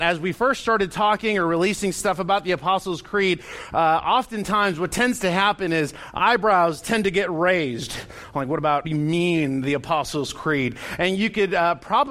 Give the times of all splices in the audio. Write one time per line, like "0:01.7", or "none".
0:08.8

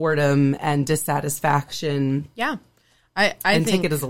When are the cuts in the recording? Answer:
none

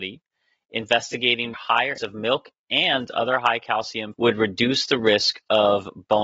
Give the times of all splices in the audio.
0:01.5
0:02.0
0:04.1

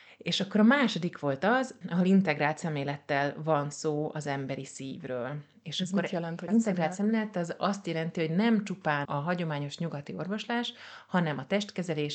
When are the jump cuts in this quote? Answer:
0:01.8
0:06.5
0:09.0

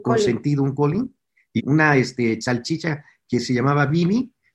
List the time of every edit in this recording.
0:01.6

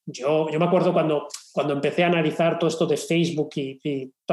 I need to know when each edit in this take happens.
0:01.5

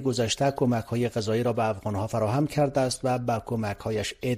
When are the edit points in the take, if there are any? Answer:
none

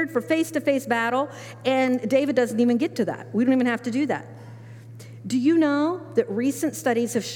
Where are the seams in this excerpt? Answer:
none

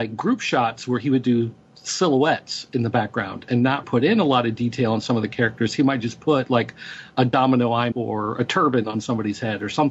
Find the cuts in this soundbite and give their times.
0:03.8
0:07.9

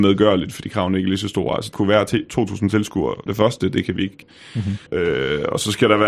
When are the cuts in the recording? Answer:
0:01.7
0:03.3
0:04.2
0:04.9

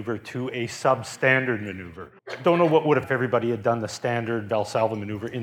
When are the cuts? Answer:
0:02.2
0:03.0

